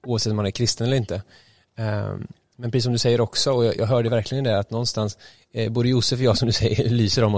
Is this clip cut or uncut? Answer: uncut